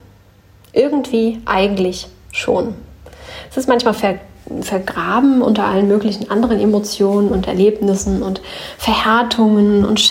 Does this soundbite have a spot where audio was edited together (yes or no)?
no